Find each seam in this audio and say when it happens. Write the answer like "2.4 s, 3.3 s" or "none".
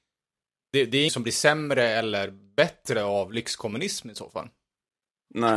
1.1 s